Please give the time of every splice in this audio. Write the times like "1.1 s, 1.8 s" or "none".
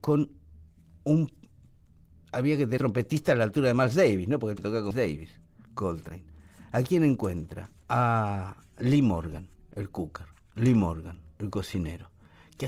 2.8 s, 4.6 s, 4.9 s, 7.8 s